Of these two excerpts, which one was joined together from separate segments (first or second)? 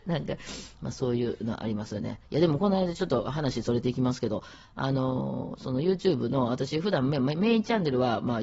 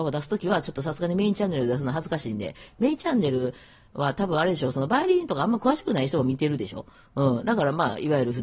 first